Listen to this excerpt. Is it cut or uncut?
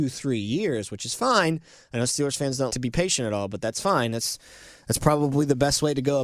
cut